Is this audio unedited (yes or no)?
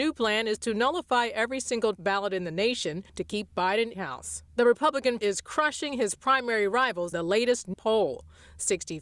no